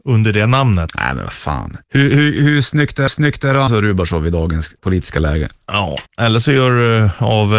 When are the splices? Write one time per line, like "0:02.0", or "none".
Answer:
0:01.8
0:03.1
0:03.7
0:04.8
0:06.1

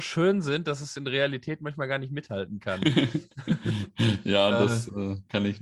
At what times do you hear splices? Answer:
none

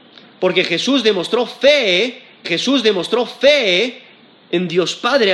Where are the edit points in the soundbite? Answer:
0:02.4

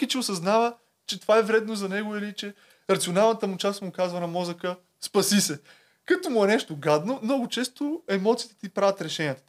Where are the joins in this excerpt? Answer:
none

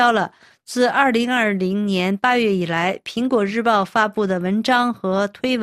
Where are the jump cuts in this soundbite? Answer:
none

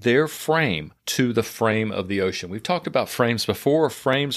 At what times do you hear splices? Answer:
none

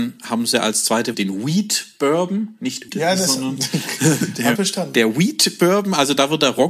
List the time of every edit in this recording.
0:01.1
0:02.9
0:04.6

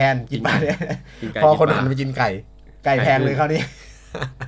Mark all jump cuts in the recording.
0:02.8

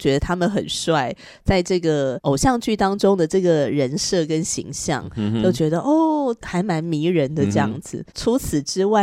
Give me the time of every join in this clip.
0:08.1

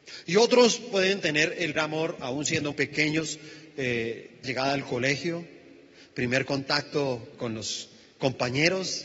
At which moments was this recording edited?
0:01.8
0:02.7
0:04.4
0:07.3

